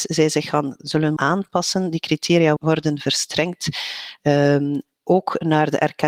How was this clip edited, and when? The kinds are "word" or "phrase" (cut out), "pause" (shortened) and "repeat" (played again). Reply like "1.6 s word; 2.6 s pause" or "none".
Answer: 1.2 s word; 2.6 s word